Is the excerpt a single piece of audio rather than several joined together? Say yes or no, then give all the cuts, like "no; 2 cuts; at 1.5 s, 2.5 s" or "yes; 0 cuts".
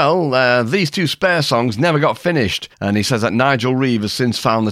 no; 1 cut; at 2.7 s